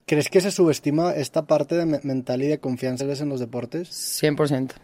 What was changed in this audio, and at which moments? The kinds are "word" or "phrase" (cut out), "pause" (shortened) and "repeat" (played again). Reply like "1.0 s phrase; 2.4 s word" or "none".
3.0 s word